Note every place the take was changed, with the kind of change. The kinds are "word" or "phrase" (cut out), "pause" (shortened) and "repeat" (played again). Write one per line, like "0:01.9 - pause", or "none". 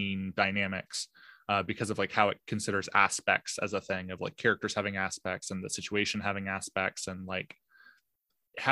none